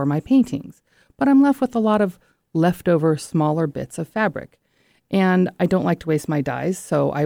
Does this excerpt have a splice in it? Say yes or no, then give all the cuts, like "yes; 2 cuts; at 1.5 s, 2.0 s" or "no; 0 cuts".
no; 0 cuts